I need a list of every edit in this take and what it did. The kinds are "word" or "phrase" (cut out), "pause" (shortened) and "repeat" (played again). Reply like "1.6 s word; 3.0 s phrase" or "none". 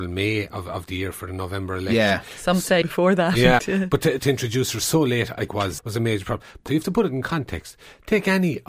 2.8 s word; 3.6 s word; 4.2 s word; 5.5 s word; 5.8 s word; 6.7 s word